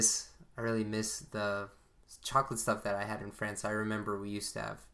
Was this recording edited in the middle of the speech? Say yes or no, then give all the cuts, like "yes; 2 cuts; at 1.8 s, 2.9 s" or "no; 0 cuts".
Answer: no; 0 cuts